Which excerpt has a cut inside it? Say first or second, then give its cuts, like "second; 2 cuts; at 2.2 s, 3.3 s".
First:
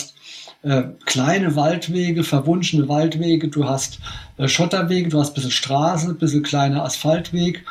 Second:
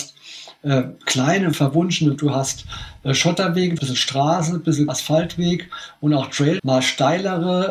second; 5 cuts; at 1.5 s, 2.2 s, 3.8 s, 4.9 s, 6.6 s